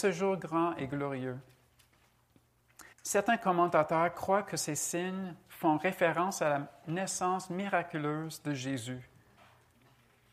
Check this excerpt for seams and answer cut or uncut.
cut